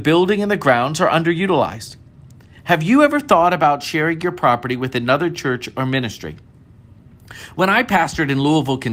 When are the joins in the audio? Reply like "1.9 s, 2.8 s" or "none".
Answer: none